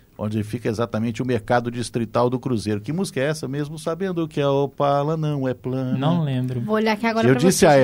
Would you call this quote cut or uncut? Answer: uncut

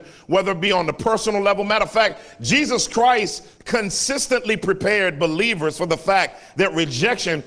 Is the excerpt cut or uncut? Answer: uncut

